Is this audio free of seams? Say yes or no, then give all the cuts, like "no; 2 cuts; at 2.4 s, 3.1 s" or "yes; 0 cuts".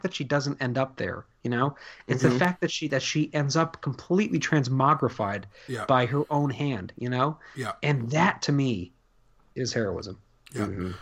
yes; 0 cuts